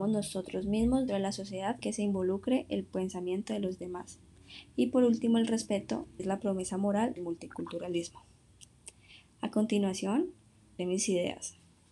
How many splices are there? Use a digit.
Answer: 5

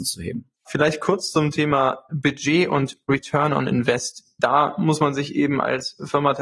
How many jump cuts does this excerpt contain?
0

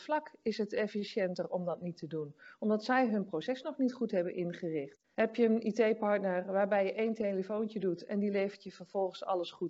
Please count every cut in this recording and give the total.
1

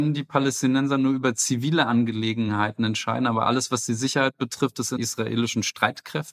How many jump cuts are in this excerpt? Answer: 1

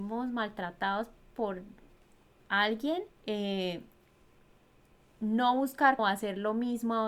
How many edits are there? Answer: 2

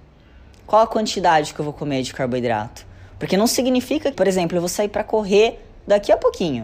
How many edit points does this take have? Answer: 1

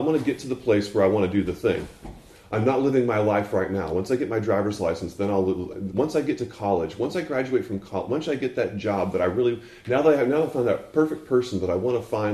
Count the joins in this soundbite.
0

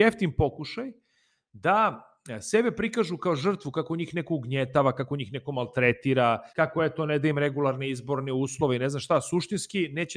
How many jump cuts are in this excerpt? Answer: 1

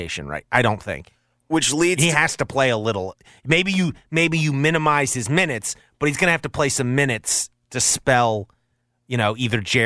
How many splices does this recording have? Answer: 0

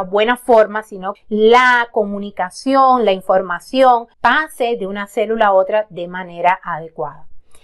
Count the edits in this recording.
2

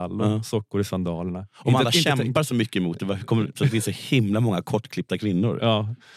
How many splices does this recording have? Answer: 0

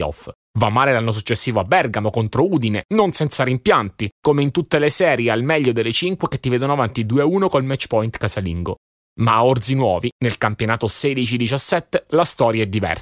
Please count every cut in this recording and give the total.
0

